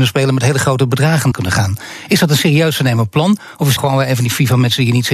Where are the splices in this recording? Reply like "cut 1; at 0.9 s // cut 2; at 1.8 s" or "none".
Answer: cut 1; at 1.3 s // cut 2; at 3.8 s

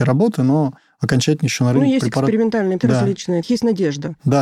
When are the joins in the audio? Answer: cut 1; at 2.8 s // cut 2; at 3.4 s

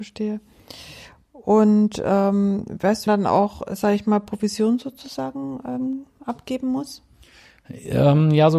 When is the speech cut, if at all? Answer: cut 1; at 3.1 s

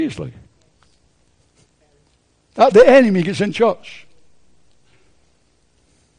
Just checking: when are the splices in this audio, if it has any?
cut 1; at 2.7 s // cut 2; at 3.5 s

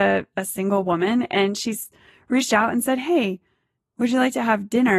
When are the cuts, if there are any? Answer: none

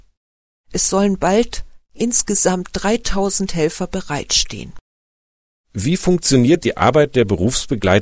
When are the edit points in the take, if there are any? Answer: none

